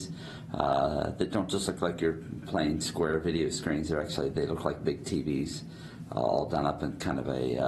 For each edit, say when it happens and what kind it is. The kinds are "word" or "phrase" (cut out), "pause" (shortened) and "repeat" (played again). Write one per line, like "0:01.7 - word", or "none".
none